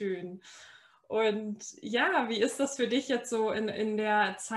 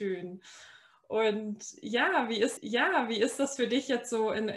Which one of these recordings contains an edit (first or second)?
second